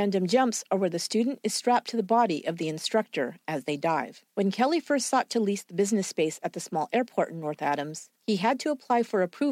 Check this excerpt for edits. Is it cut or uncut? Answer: cut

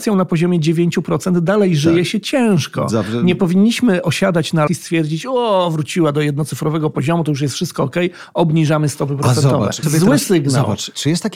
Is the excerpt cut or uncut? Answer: cut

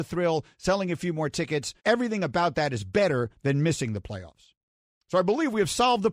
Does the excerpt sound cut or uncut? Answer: cut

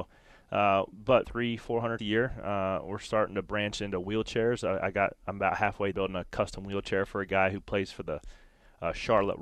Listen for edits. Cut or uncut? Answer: cut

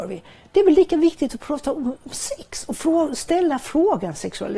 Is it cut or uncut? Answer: uncut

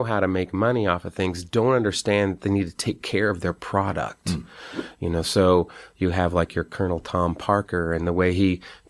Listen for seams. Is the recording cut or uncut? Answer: uncut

